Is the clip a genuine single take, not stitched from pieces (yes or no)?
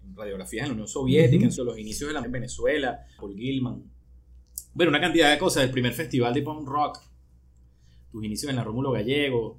no